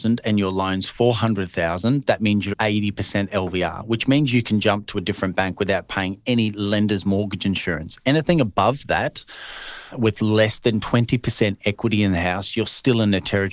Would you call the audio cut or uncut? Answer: cut